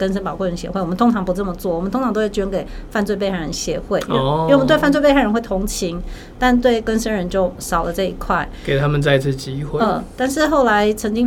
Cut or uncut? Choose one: uncut